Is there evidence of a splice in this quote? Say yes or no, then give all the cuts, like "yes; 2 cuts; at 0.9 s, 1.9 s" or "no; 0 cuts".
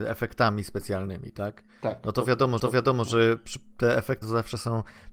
yes; 2 cuts; at 2.6 s, 4.2 s